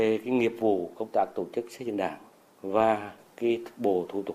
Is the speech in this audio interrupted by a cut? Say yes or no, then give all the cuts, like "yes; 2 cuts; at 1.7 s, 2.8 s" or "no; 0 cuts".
no; 0 cuts